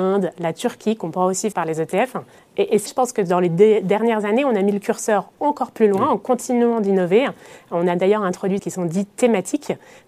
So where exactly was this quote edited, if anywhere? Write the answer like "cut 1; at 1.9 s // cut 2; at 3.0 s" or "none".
cut 1; at 1.5 s // cut 2; at 2.4 s // cut 3; at 2.9 s // cut 4; at 8.6 s